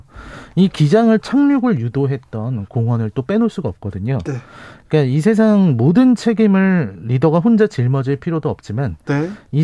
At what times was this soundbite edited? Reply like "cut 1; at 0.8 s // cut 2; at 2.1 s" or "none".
cut 1; at 1.2 s // cut 2; at 2.7 s